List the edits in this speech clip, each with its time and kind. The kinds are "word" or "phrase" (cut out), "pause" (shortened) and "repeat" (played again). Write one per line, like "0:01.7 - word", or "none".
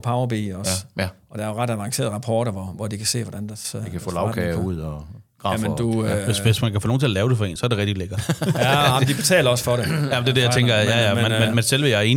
none